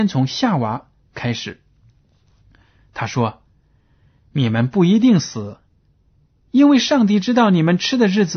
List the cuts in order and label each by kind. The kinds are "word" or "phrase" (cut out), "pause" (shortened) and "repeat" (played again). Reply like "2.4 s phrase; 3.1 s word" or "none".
none